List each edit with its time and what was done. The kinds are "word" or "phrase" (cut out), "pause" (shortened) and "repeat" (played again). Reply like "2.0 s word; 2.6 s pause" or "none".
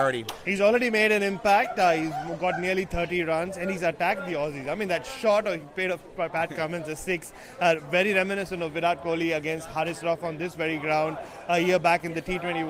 none